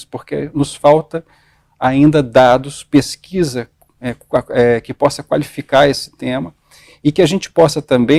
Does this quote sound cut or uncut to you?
uncut